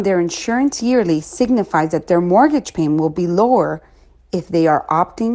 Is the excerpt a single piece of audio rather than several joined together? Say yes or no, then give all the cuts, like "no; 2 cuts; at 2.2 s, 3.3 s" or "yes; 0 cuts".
yes; 0 cuts